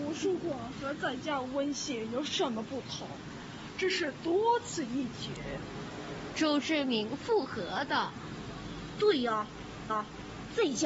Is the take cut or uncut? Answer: cut